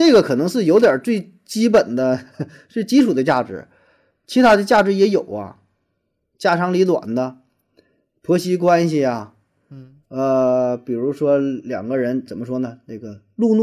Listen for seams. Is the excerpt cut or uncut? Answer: cut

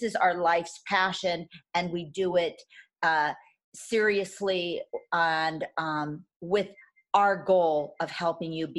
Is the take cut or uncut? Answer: uncut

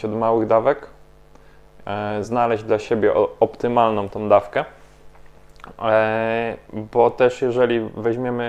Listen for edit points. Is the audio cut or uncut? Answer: uncut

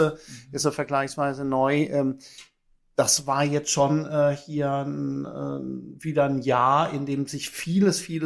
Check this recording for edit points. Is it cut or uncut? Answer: uncut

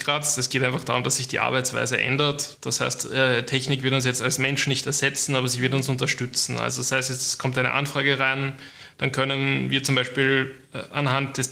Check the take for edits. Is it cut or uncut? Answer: uncut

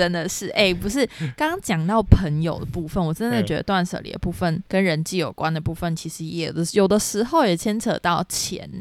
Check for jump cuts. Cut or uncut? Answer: cut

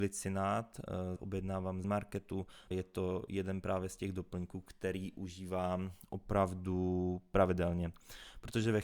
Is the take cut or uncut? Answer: cut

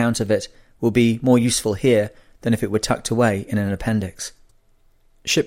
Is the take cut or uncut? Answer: uncut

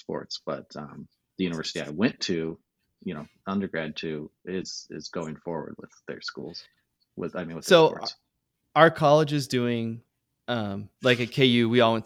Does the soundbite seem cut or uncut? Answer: uncut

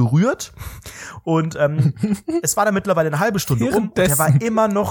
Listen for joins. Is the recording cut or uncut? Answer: uncut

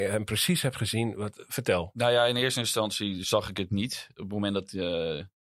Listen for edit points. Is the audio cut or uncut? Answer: uncut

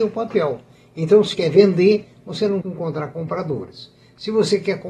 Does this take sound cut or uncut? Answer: cut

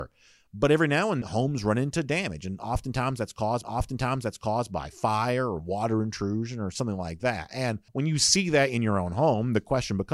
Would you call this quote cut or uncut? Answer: cut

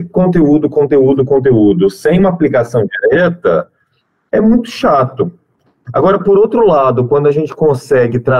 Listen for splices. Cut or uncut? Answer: uncut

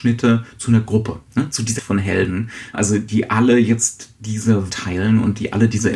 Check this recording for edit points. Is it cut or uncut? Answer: cut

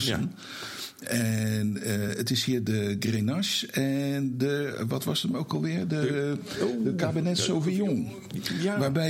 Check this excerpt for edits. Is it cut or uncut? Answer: uncut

